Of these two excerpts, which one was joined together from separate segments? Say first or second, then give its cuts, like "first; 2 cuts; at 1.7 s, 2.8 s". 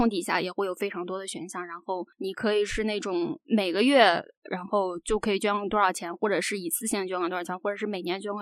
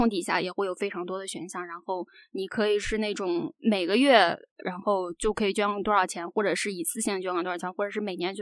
first; 1 cut; at 2.1 s